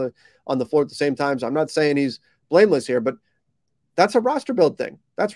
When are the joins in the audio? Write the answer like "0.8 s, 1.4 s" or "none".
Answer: none

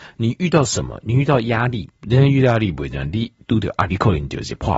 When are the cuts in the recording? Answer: 1.9 s, 3.9 s

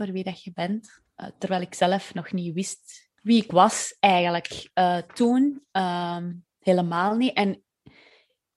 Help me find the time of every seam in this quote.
3.2 s

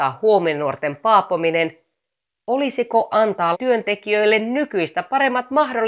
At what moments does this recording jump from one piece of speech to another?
3.1 s, 3.5 s

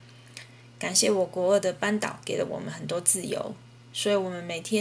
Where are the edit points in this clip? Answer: none

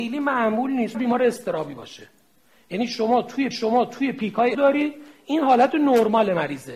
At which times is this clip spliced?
0.9 s, 3.5 s, 4.5 s

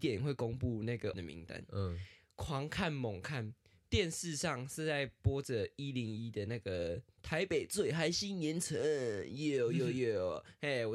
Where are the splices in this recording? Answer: 1.1 s

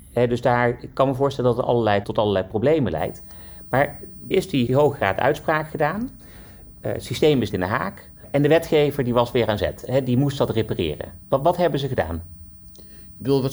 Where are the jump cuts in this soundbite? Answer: 2.0 s, 4.3 s, 4.7 s, 7.5 s

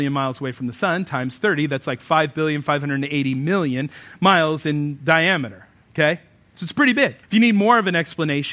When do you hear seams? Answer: 7.2 s

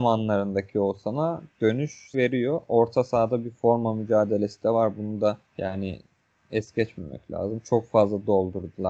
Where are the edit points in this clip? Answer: 2.1 s, 5.5 s

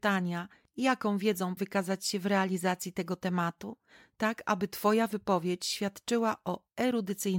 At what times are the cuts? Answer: 1.6 s

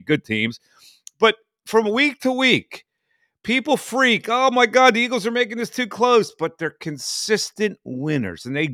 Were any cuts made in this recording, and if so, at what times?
none

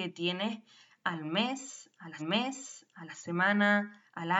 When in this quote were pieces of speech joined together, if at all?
2.2 s

